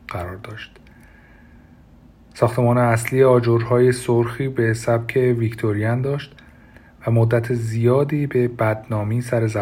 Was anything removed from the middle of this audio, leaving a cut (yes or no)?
no